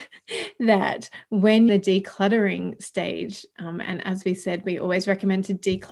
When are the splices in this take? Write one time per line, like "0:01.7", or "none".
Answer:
0:01.7